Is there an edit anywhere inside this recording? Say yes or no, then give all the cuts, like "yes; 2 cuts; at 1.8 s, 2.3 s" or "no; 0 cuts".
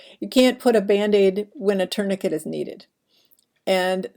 no; 0 cuts